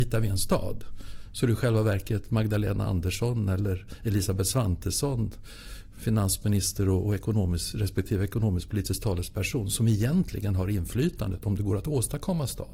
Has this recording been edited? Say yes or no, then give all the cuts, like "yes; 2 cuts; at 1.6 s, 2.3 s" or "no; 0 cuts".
no; 0 cuts